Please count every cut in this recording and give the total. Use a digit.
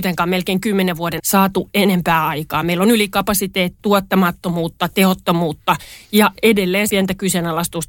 3